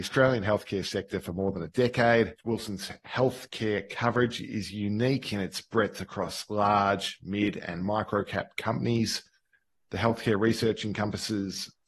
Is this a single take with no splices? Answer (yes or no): yes